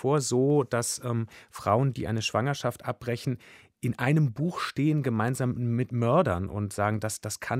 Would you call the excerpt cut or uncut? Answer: uncut